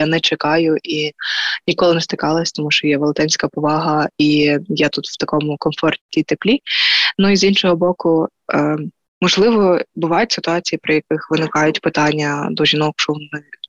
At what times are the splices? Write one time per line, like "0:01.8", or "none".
none